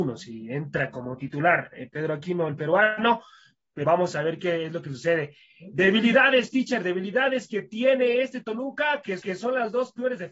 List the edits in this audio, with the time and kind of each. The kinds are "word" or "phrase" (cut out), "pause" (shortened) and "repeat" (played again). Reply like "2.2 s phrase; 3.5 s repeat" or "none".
3.8 s word; 9.2 s repeat